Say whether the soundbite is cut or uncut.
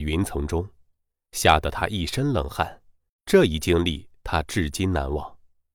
cut